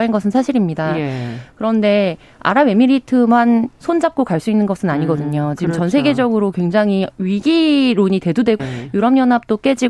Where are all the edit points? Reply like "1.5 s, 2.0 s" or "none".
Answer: 8.6 s